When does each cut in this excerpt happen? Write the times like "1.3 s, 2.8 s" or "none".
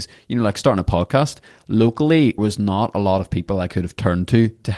2.4 s